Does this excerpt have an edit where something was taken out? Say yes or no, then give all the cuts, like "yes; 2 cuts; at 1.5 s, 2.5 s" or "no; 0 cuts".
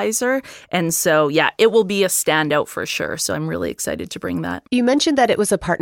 yes; 1 cut; at 4.7 s